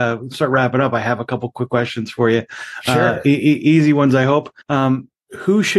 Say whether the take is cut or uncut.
cut